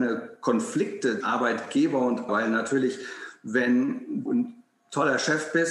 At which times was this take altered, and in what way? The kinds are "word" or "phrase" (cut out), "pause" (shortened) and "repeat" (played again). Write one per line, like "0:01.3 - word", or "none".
0:01.2 - word
0:02.3 - word
0:04.3 - word